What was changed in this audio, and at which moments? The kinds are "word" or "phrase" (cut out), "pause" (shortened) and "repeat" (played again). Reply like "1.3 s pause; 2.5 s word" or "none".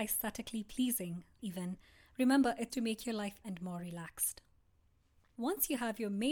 1.4 s word; 2.7 s word; 3.4 s word